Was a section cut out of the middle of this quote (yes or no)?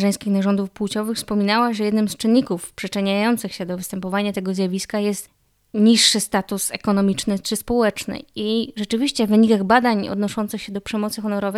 no